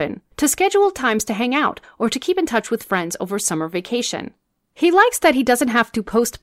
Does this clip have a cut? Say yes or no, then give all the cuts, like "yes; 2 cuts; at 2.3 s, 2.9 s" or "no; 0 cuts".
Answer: no; 0 cuts